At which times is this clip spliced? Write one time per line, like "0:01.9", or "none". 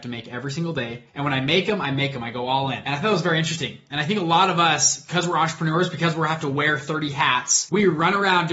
0:01.1